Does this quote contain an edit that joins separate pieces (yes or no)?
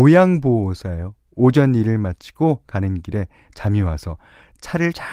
no